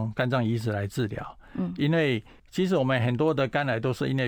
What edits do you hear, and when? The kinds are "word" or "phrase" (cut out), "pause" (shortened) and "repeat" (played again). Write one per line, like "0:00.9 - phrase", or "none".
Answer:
0:02.4 - pause